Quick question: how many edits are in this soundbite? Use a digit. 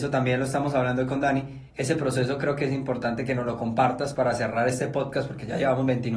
1